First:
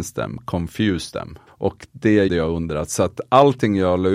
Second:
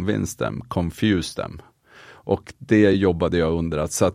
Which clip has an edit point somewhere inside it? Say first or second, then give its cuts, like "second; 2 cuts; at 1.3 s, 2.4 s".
first; 2 cuts; at 1.5 s, 2.3 s